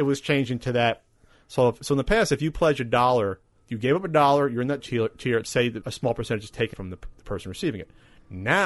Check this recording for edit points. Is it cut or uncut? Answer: cut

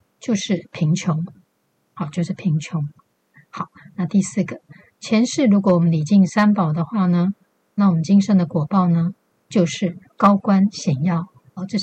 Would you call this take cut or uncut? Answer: uncut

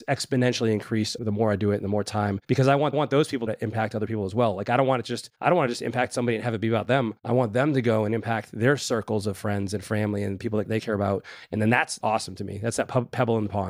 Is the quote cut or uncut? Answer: cut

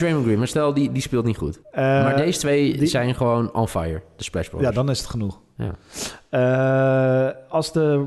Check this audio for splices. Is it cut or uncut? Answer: cut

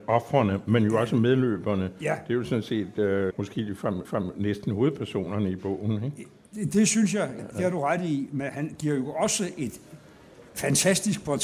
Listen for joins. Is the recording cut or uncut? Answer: cut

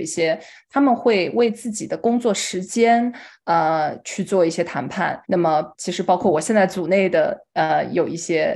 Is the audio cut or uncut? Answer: cut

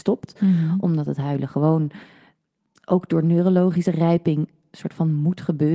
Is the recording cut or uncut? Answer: uncut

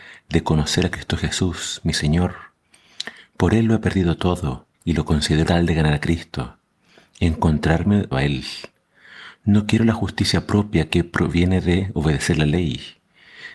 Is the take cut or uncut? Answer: cut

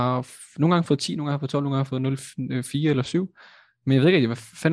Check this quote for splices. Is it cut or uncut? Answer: uncut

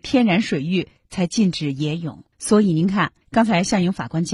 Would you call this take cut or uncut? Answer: cut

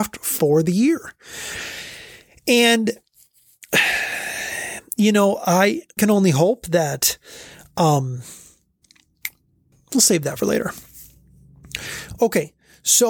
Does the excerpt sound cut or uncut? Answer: cut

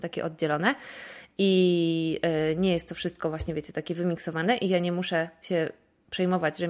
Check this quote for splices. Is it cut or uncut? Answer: uncut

